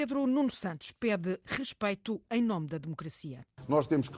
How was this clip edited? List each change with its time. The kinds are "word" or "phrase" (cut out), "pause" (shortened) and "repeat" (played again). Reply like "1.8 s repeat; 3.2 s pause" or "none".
none